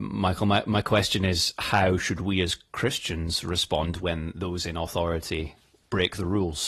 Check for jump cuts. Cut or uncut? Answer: uncut